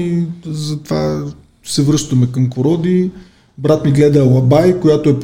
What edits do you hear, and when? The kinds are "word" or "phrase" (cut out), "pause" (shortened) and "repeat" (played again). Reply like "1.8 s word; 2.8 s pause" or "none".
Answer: 2.5 s word